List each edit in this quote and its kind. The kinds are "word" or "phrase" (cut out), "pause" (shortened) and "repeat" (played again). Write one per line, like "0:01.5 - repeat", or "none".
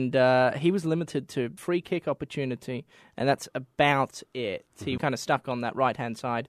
0:01.6 - phrase
0:05.0 - word